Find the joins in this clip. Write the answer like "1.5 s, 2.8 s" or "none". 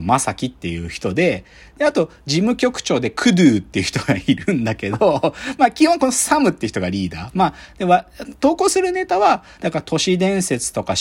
none